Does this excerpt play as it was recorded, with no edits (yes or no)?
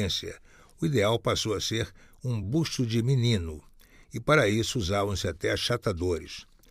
yes